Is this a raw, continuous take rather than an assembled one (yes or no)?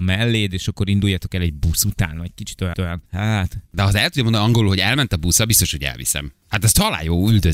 no